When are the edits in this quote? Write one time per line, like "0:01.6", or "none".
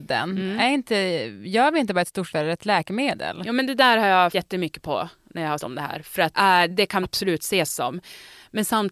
0:02.3
0:04.3
0:05.6
0:06.3
0:06.7
0:07.0